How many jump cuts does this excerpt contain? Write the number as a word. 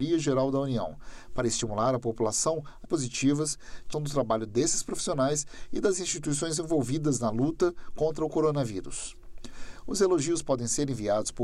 two